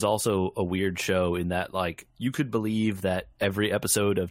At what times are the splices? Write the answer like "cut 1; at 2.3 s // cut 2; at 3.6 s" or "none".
cut 1; at 2.1 s